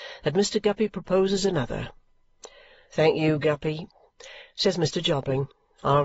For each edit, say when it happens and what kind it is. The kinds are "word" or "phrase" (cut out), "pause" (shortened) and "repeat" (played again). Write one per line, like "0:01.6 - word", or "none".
none